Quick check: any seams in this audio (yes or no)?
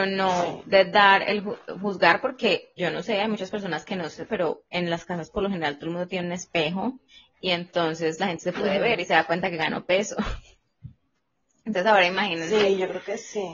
yes